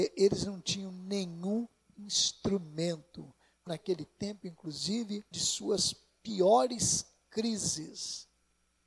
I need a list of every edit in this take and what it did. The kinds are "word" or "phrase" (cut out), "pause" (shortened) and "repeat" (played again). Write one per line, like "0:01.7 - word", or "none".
0:03.7 - phrase
0:05.3 - word

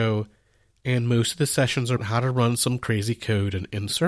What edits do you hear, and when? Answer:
0:02.0 - word

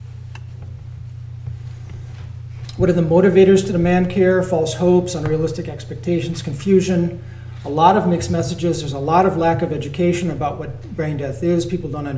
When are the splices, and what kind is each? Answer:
none

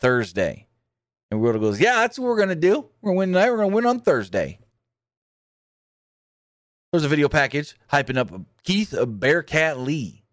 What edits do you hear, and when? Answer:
none

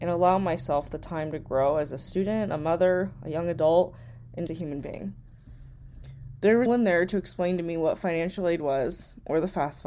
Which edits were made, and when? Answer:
0:04.5 - word
0:06.7 - word

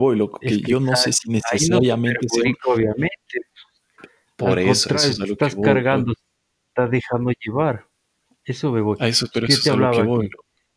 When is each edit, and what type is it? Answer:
none

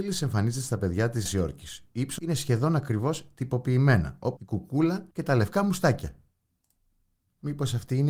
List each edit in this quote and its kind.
0:01.3 - word
0:02.2 - phrase
0:04.4 - phrase
0:05.1 - pause

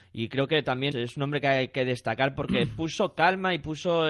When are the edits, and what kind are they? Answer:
0:00.9 - word

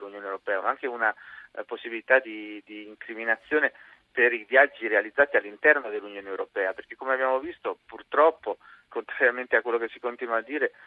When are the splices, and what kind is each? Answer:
0:08.9 - word

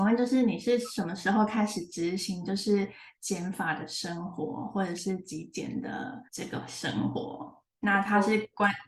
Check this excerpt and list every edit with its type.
0:06.3 - pause
0:07.7 - pause

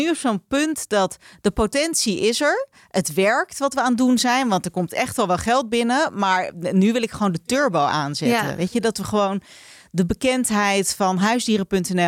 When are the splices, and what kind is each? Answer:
none

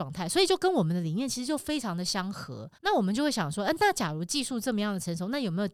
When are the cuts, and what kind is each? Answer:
0:02.8 - pause

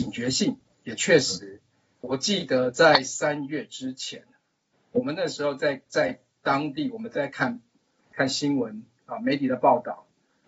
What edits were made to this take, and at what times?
none

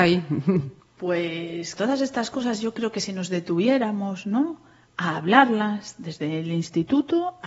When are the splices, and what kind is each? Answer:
0:01.8 - word

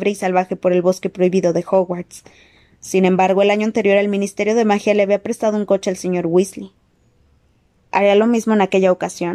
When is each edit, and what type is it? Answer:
none

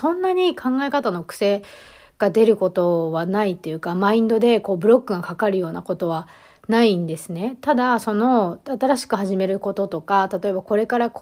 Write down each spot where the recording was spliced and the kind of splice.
none

